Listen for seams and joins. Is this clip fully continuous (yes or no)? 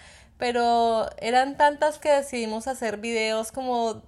no